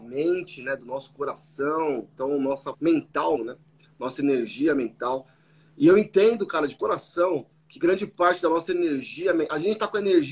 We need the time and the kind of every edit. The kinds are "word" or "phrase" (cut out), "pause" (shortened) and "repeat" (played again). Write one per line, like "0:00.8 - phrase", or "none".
0:02.7 - word
0:03.4 - word
0:07.5 - pause